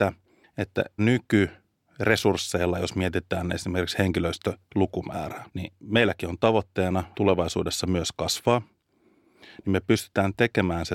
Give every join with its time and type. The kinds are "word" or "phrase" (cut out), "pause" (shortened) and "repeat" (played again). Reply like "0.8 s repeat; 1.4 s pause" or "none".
1.0 s word; 5.5 s pause; 7.1 s word